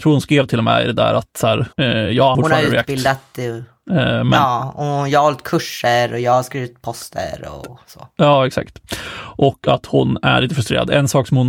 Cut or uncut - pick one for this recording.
cut